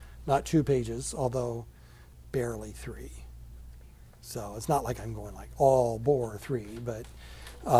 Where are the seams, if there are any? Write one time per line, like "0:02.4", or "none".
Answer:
none